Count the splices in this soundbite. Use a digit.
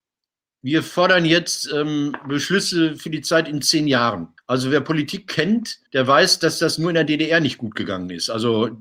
2